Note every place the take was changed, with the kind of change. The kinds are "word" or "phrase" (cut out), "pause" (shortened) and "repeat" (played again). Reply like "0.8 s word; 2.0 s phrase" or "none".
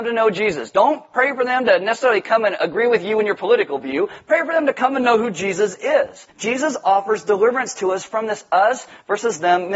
6.3 s pause